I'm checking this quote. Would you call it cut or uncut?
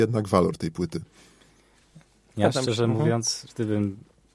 uncut